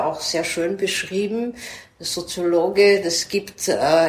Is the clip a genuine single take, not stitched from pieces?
yes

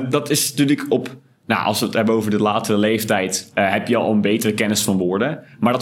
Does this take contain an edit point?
no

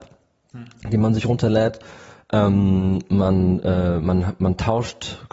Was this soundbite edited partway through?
no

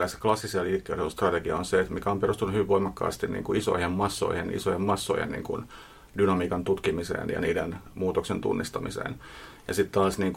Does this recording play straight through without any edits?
yes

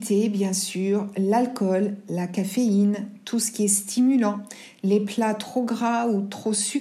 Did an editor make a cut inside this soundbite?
no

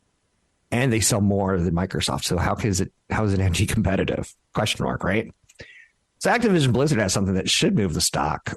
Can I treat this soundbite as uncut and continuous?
yes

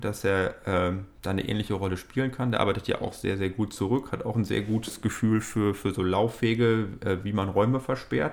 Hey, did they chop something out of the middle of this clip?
no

